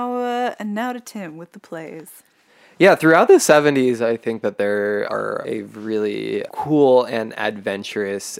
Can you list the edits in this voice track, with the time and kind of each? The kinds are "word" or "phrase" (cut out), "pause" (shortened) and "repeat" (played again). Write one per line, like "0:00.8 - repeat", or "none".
none